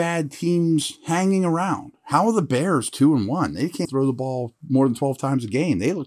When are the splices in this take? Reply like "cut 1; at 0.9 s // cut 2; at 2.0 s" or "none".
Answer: cut 1; at 3.8 s